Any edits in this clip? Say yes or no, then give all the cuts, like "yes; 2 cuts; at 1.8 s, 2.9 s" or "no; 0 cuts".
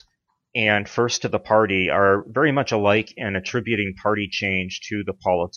no; 0 cuts